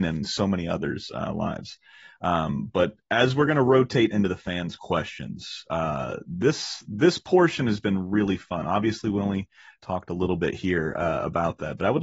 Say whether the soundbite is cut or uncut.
uncut